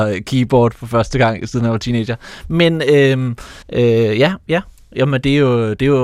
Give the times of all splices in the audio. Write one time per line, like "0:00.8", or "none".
0:03.6